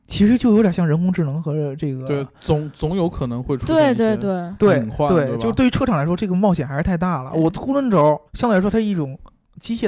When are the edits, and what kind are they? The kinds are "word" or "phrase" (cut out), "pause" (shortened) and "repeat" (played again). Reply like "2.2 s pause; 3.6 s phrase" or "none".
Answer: 8.3 s pause